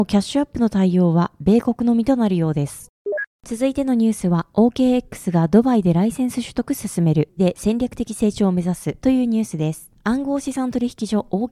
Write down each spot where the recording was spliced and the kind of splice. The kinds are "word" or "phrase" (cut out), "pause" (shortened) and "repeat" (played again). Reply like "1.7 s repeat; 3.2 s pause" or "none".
7.4 s word